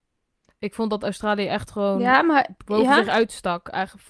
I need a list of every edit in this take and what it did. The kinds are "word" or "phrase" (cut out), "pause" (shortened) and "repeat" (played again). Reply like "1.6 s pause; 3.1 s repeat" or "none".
none